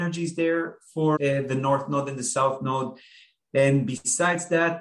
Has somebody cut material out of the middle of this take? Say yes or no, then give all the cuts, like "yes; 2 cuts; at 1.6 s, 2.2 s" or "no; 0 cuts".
yes; 1 cut; at 1.2 s